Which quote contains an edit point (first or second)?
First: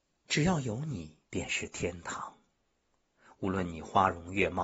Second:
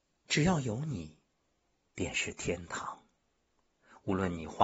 first